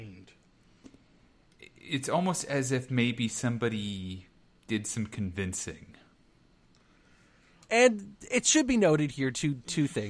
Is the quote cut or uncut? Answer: uncut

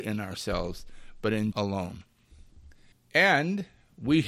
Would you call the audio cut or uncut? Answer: cut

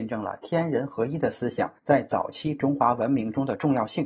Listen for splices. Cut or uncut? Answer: cut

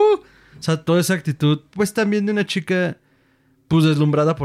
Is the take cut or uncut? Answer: uncut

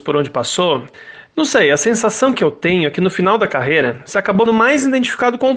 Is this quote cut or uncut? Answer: cut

